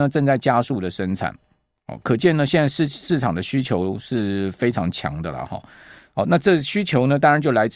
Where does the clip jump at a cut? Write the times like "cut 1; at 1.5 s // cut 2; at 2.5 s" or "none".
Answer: none